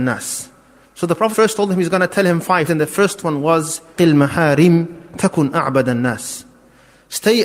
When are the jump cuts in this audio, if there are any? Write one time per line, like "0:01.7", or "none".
0:01.3
0:02.7
0:04.0